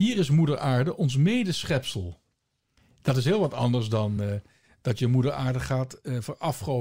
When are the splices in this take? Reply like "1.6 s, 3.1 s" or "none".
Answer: none